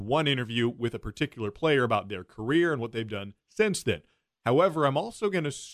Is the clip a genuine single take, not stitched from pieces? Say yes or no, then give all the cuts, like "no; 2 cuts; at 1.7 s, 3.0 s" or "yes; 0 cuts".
yes; 0 cuts